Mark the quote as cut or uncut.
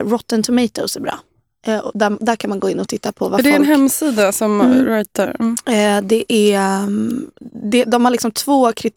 uncut